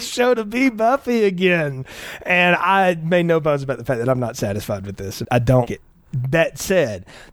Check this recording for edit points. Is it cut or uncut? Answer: cut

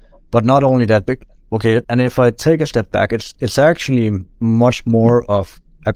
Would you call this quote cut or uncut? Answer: cut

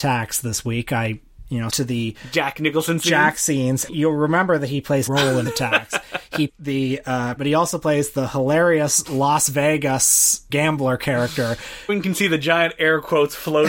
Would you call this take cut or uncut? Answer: cut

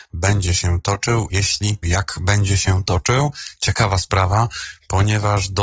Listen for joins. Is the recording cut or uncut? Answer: cut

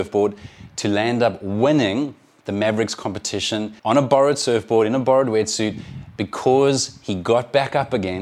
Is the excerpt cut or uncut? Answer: cut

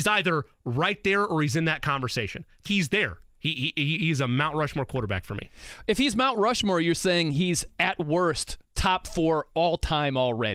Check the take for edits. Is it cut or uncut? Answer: cut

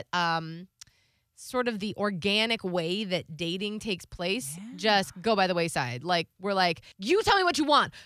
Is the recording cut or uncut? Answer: cut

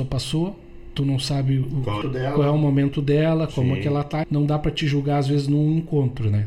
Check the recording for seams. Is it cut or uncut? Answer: cut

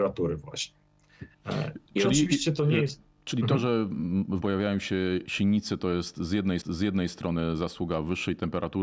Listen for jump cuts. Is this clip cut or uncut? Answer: cut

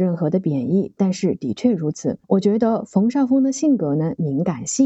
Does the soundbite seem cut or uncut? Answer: cut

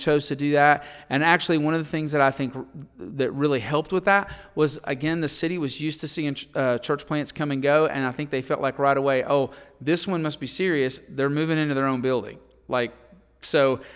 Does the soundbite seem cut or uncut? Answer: uncut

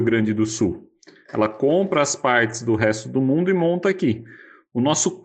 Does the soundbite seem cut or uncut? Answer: uncut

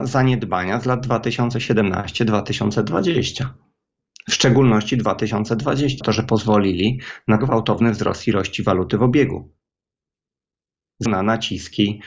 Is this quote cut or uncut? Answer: cut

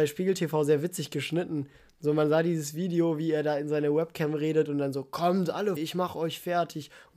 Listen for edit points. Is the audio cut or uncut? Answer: cut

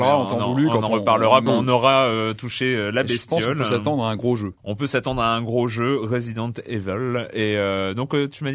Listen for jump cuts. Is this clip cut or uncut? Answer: cut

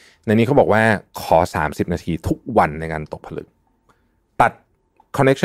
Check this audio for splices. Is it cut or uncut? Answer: uncut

